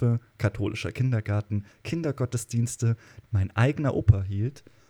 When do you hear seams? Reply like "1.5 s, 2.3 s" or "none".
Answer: 3.2 s